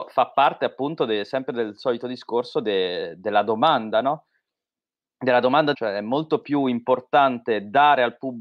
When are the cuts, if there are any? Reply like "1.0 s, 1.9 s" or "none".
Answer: 5.7 s